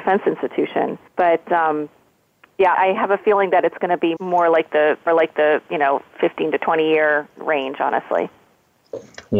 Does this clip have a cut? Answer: yes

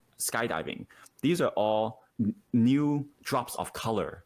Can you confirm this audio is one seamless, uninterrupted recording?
no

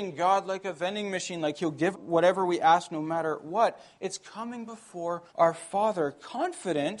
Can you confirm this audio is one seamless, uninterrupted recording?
no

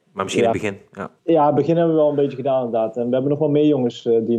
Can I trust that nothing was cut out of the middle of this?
no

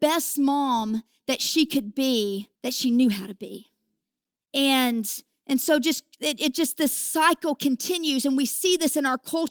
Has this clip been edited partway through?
yes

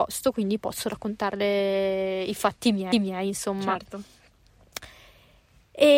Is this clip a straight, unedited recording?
no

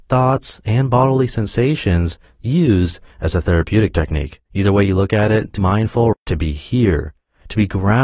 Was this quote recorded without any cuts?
no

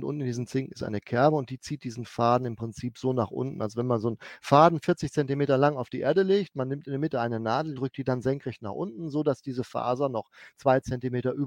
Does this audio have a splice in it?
yes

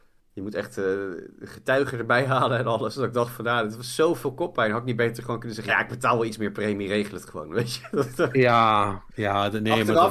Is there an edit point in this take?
yes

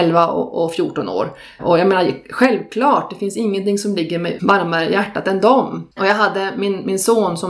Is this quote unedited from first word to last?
no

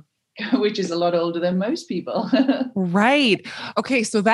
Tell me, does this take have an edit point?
no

